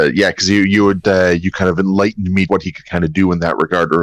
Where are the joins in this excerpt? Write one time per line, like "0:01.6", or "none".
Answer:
0:02.5